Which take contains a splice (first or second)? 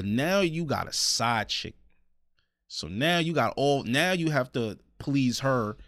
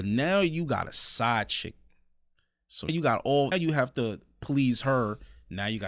second